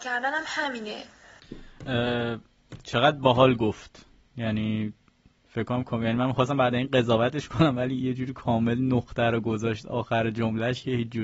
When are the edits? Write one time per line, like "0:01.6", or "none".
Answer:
0:04.3